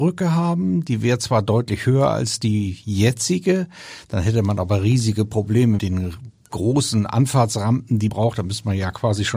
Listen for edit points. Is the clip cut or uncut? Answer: cut